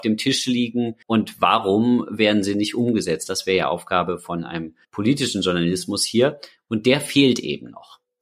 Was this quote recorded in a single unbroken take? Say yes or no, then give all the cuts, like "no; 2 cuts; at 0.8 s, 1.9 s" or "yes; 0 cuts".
no; 2 cuts; at 1.0 s, 4.8 s